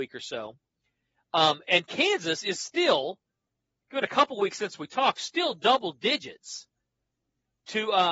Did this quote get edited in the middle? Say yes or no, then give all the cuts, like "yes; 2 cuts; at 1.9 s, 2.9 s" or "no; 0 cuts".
no; 0 cuts